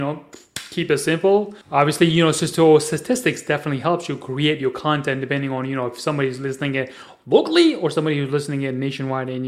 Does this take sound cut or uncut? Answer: cut